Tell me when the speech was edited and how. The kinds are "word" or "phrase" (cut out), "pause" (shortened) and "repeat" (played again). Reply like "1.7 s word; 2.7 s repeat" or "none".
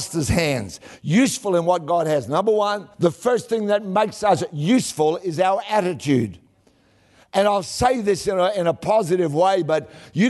2.9 s pause